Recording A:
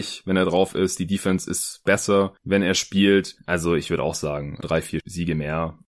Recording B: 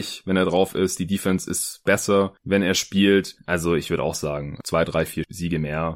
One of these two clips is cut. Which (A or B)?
A